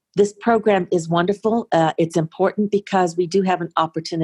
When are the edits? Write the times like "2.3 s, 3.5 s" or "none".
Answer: none